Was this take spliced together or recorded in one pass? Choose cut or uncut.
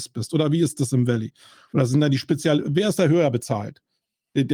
uncut